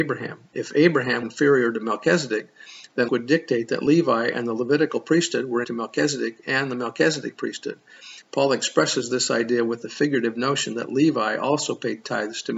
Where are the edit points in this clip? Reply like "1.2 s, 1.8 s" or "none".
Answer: 1.2 s, 3.1 s, 5.6 s